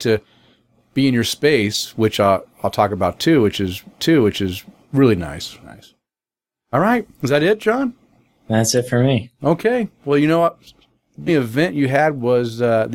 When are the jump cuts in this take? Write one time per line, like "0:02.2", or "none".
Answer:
0:02.5
0:04.0
0:05.6
0:07.1
0:11.3